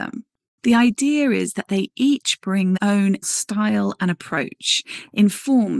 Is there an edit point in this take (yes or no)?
yes